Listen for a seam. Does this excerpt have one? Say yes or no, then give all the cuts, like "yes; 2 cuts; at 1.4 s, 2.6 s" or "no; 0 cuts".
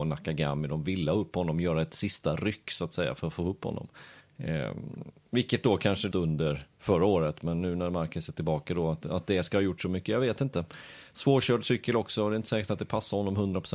yes; 3 cuts; at 4.2 s, 6.1 s, 6.7 s